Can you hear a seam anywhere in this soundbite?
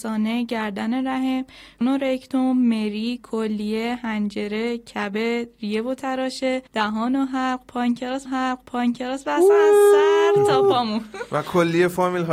yes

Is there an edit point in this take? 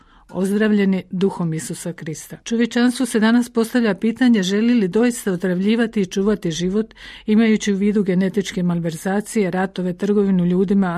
yes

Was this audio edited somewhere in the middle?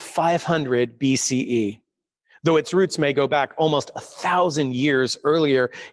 no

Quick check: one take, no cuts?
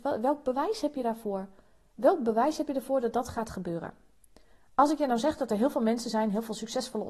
yes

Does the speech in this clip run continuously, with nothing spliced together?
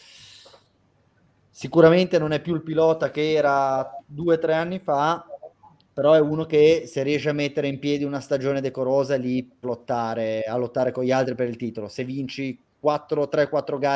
no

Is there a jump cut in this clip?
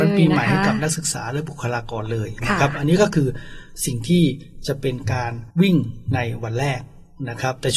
yes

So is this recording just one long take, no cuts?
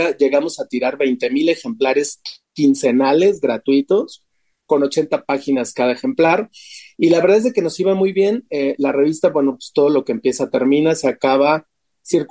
yes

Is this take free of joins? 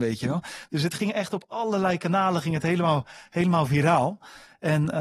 yes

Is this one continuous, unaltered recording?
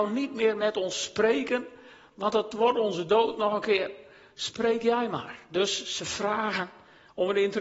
yes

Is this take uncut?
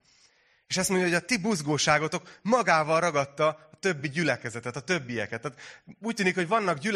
yes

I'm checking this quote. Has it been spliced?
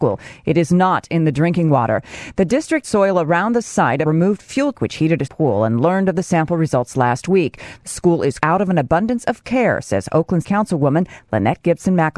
yes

